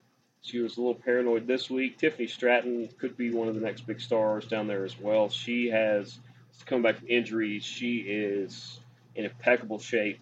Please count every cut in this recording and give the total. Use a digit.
0